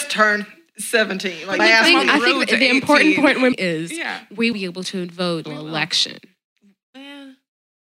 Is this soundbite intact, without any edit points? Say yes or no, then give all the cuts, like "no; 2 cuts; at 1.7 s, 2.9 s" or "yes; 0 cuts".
no; 4 cuts; at 1.6 s, 3.5 s, 4.5 s, 5.4 s